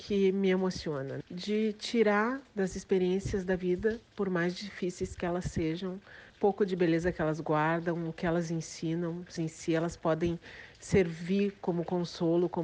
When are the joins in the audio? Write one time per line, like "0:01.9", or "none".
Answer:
0:01.2
0:04.0
0:06.3
0:09.4